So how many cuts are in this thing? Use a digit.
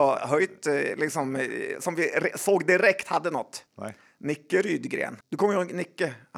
2